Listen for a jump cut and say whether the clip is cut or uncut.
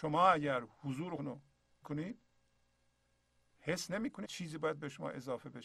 cut